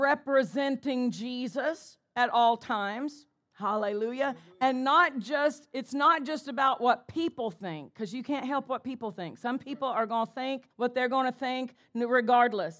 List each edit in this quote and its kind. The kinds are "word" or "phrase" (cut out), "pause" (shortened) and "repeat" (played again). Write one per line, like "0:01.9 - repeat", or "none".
0:10.7 - pause